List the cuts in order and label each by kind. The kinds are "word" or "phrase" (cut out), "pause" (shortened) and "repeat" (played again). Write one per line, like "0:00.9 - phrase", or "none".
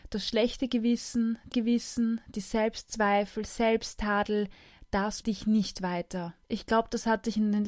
0:01.5 - repeat
0:05.2 - word
0:06.4 - pause